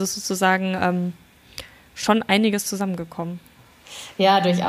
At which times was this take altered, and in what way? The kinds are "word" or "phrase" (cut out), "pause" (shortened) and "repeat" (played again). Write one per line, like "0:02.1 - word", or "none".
none

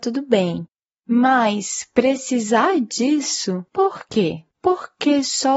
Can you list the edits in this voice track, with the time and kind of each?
0:03.7 - pause
0:04.5 - pause

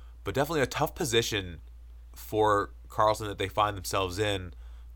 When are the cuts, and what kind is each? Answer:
none

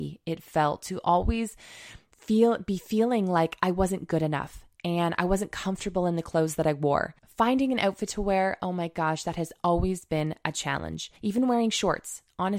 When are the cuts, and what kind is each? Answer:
0:07.2 - pause
0:11.2 - pause

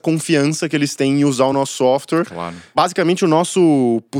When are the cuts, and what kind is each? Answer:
none

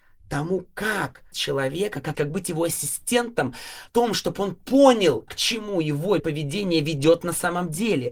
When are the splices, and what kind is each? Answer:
0:01.3 - word
0:02.1 - word
0:03.9 - word
0:05.3 - word
0:06.2 - word

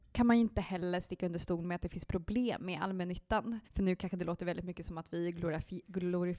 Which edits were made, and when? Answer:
0:03.6 - pause

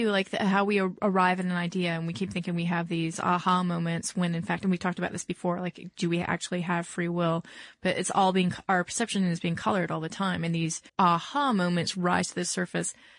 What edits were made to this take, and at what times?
0:10.9 - pause

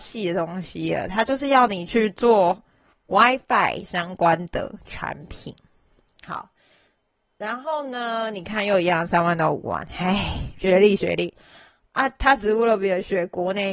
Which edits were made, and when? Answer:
none

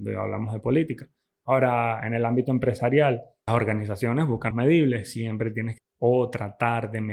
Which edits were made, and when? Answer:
0:03.5 - word
0:04.5 - word
0:05.8 - word

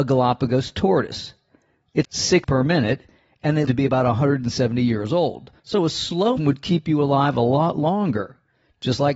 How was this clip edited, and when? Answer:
0:02.0 - word
0:02.4 - word
0:03.7 - word
0:05.6 - pause
0:06.4 - word

